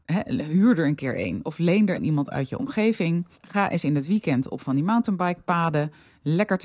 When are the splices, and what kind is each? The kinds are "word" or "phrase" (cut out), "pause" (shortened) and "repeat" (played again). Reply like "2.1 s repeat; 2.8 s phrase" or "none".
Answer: 1.9 s phrase; 3.3 s pause